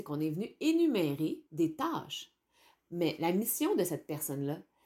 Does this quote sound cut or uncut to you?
cut